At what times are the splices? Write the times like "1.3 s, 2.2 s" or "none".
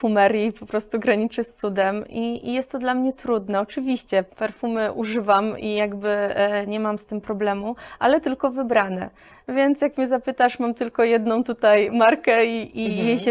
4.3 s